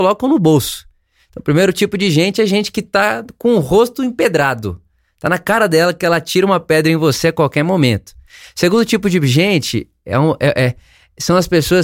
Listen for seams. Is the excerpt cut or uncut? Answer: uncut